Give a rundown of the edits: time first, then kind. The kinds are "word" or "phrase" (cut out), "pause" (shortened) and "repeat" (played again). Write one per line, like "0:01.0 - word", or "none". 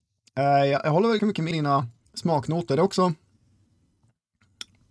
0:01.2 - word
0:01.5 - word
0:02.1 - pause